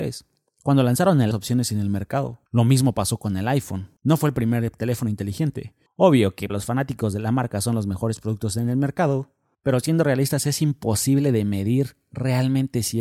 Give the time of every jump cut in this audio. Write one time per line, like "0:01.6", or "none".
0:01.3
0:02.5
0:04.0
0:05.9
0:06.5
0:09.5